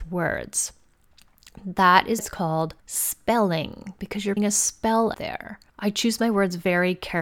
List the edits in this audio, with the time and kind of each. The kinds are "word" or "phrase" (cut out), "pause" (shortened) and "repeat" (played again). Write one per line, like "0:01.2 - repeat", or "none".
0:02.2 - word
0:02.8 - pause
0:04.4 - word
0:05.1 - word
0:05.7 - pause